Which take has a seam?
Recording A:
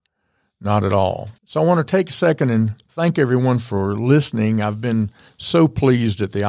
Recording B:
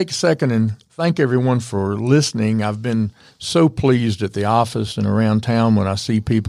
A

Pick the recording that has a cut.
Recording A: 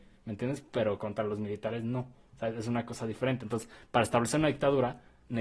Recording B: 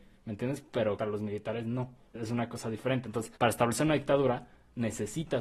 B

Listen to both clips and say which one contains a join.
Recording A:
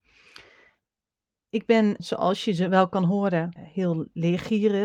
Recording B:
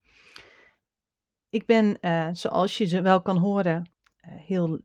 A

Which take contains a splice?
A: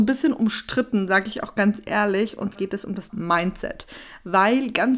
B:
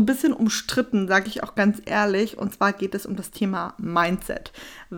A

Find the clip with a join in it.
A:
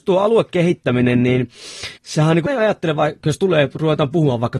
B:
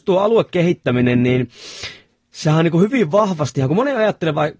A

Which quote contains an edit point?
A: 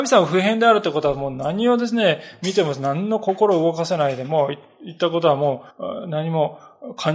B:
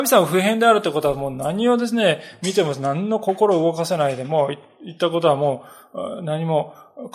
A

